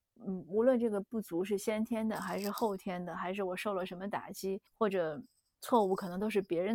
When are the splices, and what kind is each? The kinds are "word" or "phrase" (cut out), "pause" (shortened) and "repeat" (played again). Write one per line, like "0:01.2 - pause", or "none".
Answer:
0:04.7 - pause